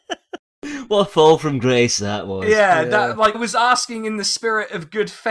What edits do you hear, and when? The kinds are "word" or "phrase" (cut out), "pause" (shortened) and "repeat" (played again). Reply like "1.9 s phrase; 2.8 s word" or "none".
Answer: 3.3 s word